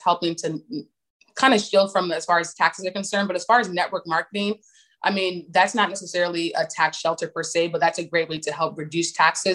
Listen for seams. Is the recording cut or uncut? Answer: uncut